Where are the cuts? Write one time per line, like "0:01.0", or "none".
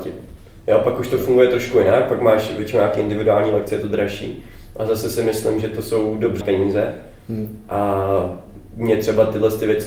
0:06.4